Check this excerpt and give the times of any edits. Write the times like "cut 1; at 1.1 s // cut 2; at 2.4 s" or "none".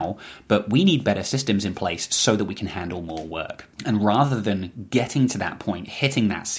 cut 1; at 3.7 s